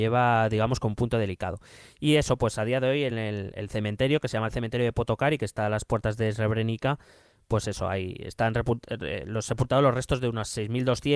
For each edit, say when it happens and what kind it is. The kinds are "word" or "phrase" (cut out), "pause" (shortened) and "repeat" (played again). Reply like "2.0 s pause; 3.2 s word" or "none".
none